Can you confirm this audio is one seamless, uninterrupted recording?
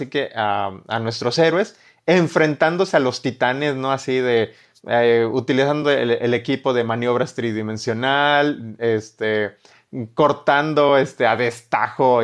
yes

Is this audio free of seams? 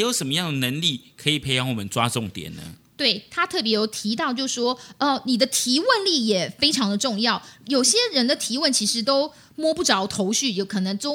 yes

